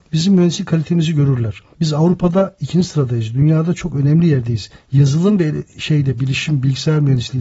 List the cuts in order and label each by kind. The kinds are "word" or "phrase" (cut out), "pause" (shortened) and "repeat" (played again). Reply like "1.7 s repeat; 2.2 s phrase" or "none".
1.7 s pause